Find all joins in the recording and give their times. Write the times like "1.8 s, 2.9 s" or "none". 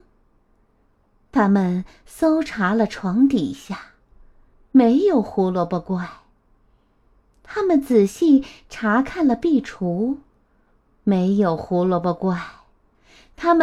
none

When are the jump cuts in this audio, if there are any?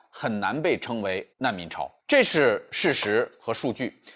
1.3 s, 2.0 s

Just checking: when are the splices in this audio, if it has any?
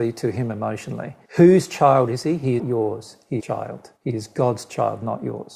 1.2 s, 2.6 s, 3.4 s, 4.0 s

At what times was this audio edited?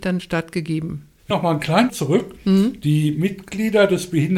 1.3 s, 1.9 s

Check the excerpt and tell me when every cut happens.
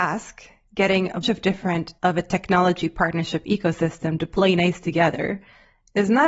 1.2 s, 2.0 s

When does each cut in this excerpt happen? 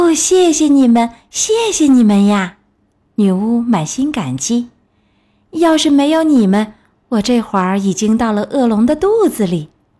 none

